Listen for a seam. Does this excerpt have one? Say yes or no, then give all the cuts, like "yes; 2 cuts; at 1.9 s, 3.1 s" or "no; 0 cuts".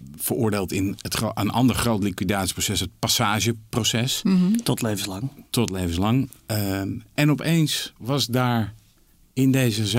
no; 0 cuts